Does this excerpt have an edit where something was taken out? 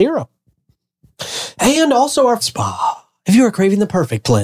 yes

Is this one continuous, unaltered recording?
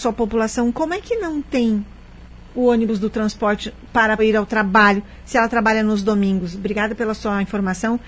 no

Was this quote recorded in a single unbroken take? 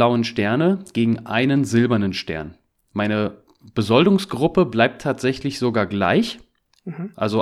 yes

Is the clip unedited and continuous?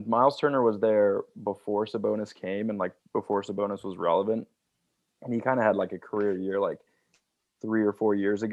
yes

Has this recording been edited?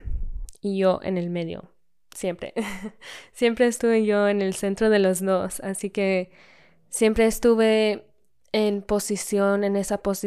no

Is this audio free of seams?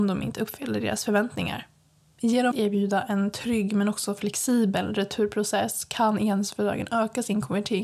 no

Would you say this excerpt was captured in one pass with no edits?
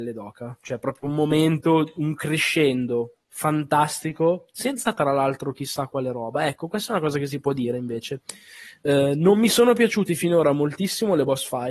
no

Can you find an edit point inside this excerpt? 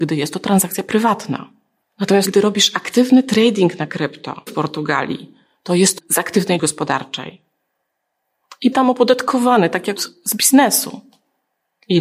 yes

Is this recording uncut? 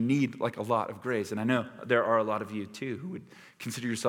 yes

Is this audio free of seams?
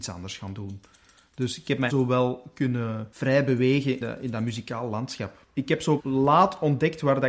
no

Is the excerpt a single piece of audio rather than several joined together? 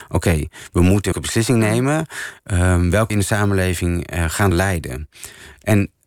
no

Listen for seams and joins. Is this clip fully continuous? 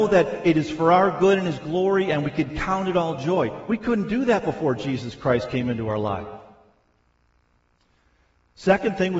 yes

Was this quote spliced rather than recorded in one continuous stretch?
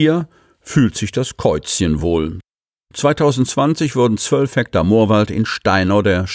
no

